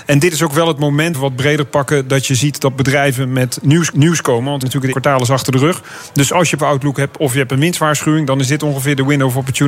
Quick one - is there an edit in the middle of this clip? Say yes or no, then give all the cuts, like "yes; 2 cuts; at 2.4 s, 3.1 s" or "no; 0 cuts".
yes; 5 cuts; at 1.1 s, 3.9 s, 4.6 s, 4.9 s, 6.6 s